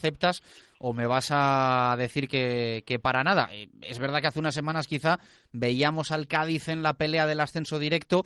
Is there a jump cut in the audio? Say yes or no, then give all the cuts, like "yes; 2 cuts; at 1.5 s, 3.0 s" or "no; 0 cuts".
no; 0 cuts